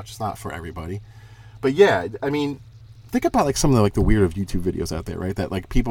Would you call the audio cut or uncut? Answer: uncut